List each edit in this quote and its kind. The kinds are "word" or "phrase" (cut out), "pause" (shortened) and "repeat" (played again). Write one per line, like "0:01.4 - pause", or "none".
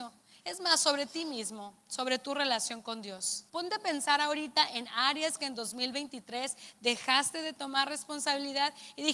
0:03.5 - pause